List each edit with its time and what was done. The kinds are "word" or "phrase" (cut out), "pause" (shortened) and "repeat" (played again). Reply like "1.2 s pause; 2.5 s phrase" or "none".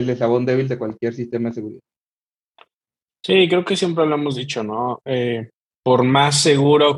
none